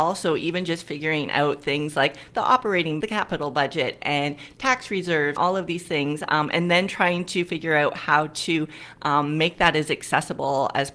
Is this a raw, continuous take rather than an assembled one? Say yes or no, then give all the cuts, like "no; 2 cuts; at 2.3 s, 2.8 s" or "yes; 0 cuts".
no; 2 cuts; at 3.0 s, 5.4 s